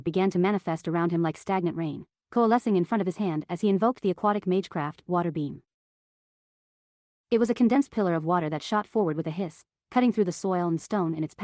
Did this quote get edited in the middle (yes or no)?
no